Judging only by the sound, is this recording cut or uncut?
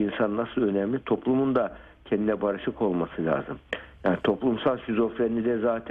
uncut